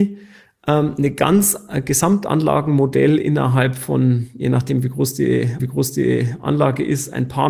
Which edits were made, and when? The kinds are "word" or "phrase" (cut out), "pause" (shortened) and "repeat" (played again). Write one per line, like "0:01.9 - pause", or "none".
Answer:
0:05.6 - repeat